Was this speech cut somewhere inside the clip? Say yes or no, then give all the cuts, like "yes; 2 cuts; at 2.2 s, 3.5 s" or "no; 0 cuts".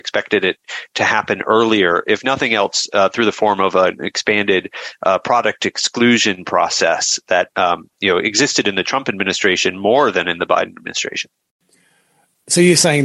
no; 0 cuts